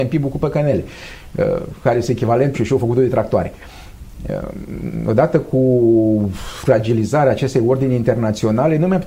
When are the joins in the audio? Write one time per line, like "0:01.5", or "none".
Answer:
0:02.5